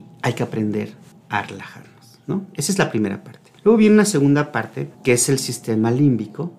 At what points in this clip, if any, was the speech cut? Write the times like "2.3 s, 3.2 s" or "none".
1.1 s, 3.6 s, 4.9 s